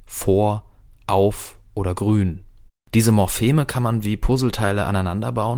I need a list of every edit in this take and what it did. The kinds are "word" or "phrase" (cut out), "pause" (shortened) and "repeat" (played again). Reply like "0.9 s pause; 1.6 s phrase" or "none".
none